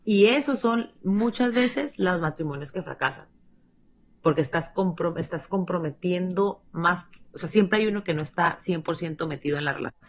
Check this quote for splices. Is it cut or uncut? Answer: uncut